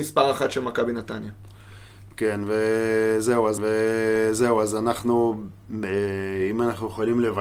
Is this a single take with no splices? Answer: no; 1 cut; at 3.6 s

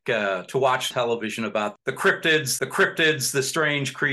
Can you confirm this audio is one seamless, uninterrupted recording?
no; 3 cuts; at 0.9 s, 1.8 s, 2.6 s

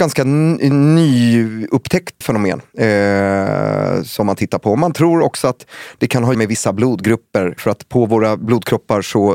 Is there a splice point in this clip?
yes; 2 cuts; at 2.2 s, 6.3 s

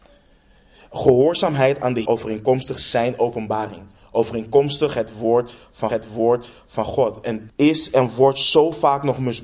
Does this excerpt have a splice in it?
yes; 3 cuts; at 2.0 s, 5.9 s, 7.5 s

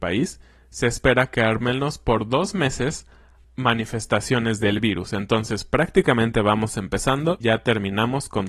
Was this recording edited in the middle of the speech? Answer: yes; 2 cuts; at 3.4 s, 7.4 s

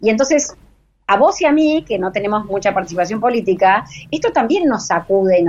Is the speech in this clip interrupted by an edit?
no; 0 cuts

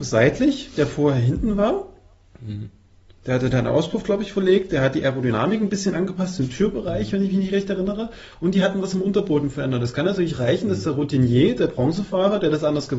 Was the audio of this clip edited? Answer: no; 0 cuts

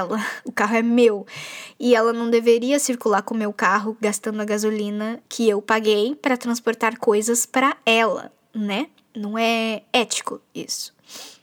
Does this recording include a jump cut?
yes; 1 cut; at 5.3 s

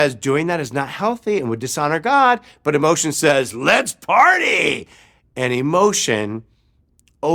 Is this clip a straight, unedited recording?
yes; 0 cuts

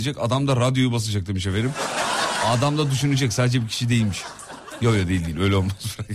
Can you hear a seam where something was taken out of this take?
no; 0 cuts

